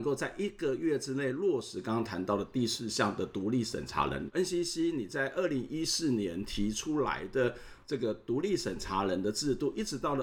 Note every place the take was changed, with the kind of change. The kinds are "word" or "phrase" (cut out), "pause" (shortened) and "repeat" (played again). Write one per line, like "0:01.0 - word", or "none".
none